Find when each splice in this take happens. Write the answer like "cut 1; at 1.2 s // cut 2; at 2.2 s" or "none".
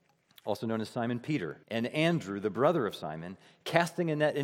cut 1; at 1.6 s